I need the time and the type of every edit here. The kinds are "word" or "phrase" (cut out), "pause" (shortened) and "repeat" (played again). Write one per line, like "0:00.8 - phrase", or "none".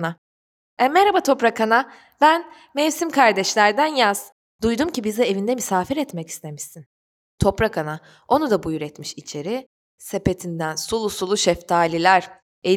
none

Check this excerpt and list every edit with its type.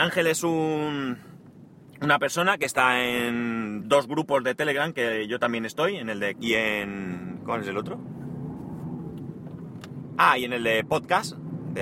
0:06.3 - word

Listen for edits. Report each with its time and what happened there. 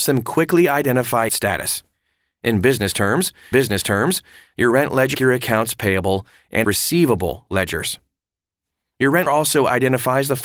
0:01.3 - phrase
0:03.5 - repeat
0:05.1 - phrase
0:06.6 - word
0:09.3 - word

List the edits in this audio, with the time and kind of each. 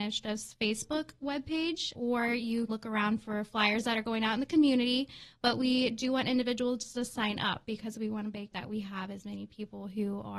0:01.9 - word
0:02.7 - word
0:08.5 - word

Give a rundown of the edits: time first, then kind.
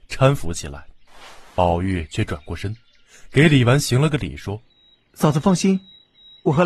0:04.7 - pause

